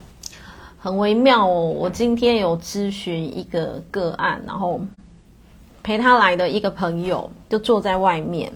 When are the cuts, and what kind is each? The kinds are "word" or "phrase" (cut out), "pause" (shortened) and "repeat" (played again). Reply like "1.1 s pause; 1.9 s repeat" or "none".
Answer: 7.4 s pause

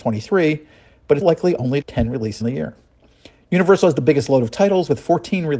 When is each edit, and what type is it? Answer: 1.2 s word; 1.8 s word; 2.4 s word

